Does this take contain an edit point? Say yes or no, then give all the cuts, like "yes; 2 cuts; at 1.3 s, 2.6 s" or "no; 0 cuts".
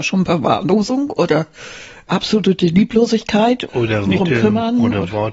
yes; 3 cuts; at 2.1 s, 3.7 s, 4.2 s